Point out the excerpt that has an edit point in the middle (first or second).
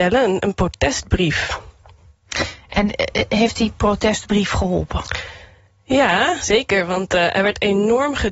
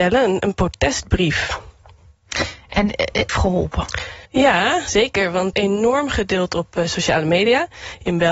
second